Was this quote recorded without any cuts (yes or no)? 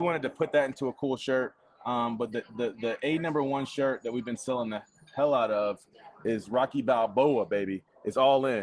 yes